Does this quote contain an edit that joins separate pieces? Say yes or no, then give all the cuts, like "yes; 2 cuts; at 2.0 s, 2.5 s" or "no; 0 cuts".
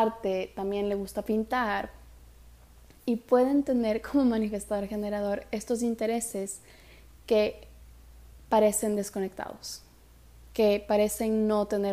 no; 0 cuts